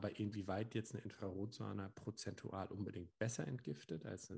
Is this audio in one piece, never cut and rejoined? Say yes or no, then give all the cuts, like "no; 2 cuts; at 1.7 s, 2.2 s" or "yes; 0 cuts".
yes; 0 cuts